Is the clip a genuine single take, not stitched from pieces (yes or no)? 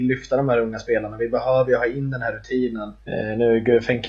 no